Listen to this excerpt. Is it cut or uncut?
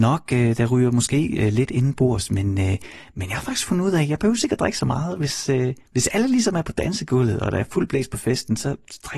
uncut